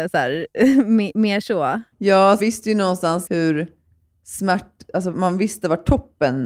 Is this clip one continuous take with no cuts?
no; 4 cuts; at 1.9 s, 2.4 s, 3.3 s, 5.1 s

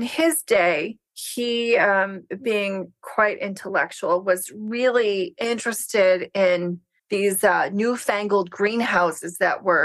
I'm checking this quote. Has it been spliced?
yes; 2 cuts; at 1.1 s, 7.0 s

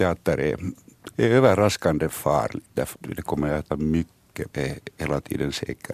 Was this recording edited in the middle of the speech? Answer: yes; 4 cuts; at 1.1 s, 2.9 s, 3.7 s, 4.5 s

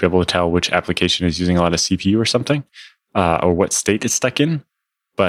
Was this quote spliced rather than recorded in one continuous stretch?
no; 0 cuts

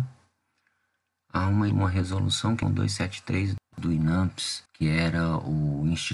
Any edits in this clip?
yes; 3 cuts; at 1.7 s, 2.6 s, 4.7 s

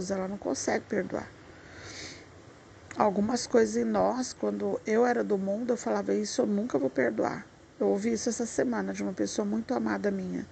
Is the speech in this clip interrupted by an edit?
no; 0 cuts

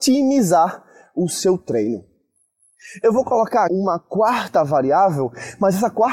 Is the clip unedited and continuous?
no; 1 cut; at 3.7 s

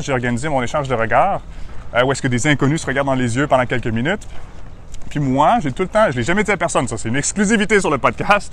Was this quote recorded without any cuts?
yes; 0 cuts

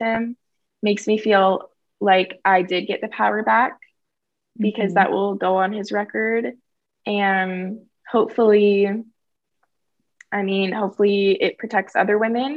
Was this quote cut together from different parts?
no; 0 cuts

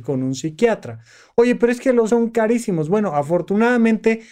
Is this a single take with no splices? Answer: no; 1 cut; at 2.1 s

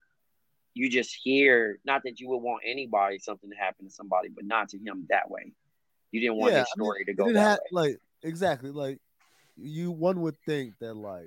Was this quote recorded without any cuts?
yes; 0 cuts

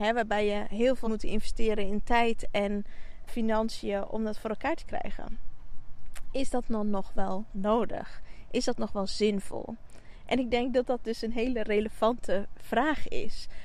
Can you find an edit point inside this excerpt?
yes; 2 cuts; at 1.1 s, 3.3 s

